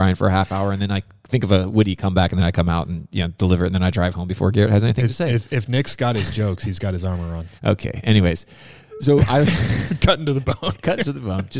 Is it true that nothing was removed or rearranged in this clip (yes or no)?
no